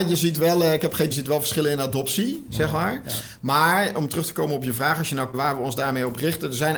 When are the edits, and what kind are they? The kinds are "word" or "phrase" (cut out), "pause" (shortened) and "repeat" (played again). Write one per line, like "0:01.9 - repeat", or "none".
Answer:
0:01.1 - phrase
0:05.3 - word